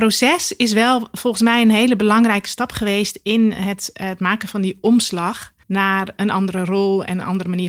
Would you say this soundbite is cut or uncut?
cut